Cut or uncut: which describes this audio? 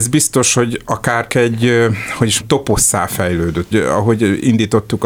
cut